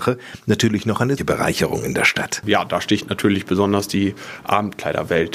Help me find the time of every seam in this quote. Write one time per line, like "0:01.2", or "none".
0:01.2